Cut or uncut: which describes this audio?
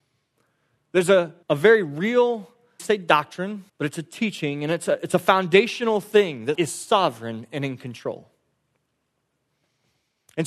cut